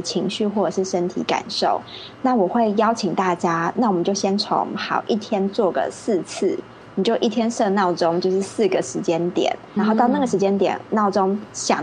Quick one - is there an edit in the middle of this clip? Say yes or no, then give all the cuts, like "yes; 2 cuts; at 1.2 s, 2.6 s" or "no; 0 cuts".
yes; 1 cut; at 9.8 s